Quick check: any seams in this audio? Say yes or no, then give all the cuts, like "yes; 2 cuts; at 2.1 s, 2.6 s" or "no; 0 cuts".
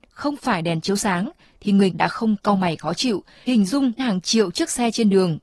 yes; 3 cuts; at 1.9 s, 3.5 s, 4.0 s